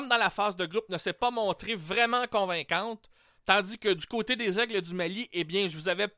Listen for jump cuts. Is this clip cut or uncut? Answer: uncut